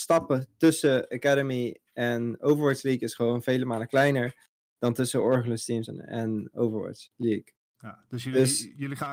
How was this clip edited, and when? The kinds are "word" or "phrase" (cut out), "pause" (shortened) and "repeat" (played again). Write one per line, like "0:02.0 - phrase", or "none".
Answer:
none